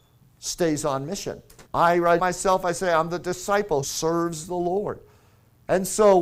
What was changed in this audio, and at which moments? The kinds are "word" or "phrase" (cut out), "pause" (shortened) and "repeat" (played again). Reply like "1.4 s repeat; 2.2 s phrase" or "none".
1.7 s pause; 2.2 s word; 3.8 s word